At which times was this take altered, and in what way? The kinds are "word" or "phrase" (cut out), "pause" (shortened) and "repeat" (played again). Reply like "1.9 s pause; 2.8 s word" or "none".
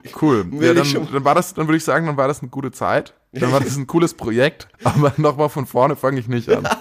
4.7 s pause